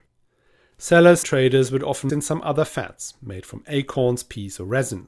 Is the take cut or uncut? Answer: cut